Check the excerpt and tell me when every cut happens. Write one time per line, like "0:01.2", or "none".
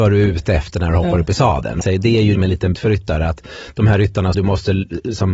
0:01.8
0:02.4
0:02.7
0:04.3